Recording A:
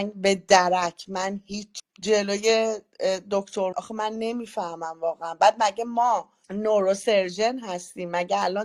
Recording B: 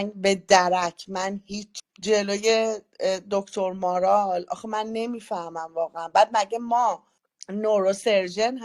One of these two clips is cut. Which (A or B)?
A